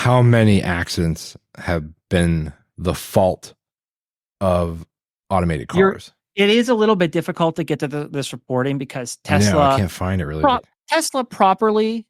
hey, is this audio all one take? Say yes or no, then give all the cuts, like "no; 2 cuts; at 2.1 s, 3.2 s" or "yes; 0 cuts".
yes; 0 cuts